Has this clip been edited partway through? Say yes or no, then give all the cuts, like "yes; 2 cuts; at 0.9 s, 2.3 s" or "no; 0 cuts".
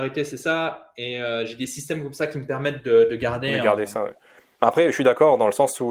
no; 0 cuts